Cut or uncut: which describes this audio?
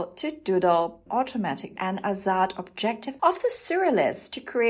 cut